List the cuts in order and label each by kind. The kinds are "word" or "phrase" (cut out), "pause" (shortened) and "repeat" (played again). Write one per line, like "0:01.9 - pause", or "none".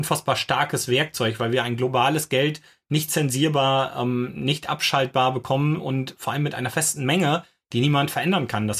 none